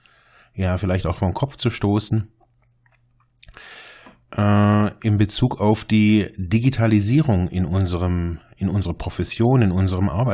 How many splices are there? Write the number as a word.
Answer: zero